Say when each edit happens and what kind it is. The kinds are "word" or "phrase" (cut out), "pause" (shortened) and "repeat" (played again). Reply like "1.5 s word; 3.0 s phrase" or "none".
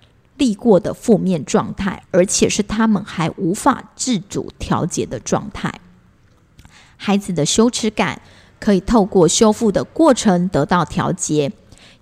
2.0 s pause